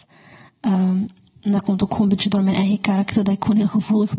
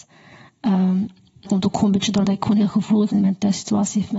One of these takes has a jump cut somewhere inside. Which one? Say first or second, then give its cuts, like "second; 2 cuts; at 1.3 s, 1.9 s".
second; 3 cuts; at 1.5 s, 2.2 s, 3.1 s